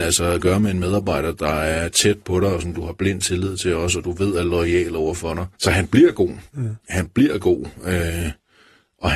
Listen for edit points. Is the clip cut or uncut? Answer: cut